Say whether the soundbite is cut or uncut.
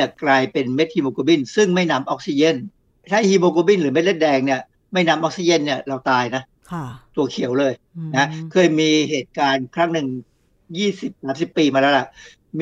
uncut